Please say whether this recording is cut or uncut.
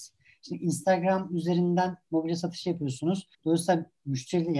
cut